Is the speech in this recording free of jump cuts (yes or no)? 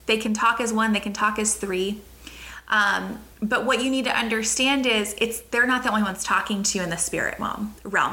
no